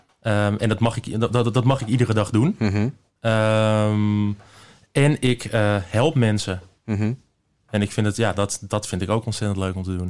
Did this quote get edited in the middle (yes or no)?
no